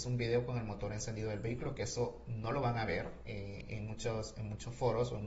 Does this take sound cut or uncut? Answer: uncut